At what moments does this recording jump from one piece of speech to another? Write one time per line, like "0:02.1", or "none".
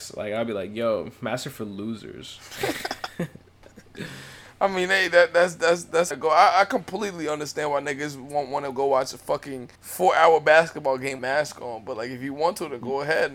0:06.1
0:09.7
0:11.2

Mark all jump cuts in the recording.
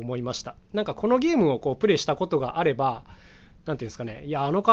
none

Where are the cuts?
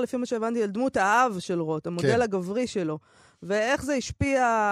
none

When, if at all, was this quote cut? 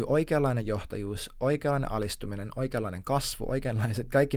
none

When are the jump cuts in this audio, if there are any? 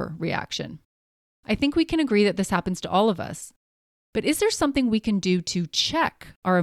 none

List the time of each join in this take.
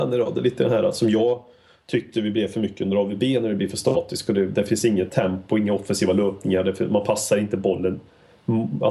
none

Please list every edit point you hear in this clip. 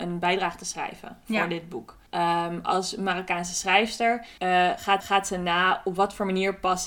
0:02.1
0:04.4
0:05.0

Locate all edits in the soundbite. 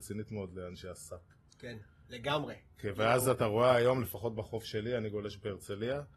none

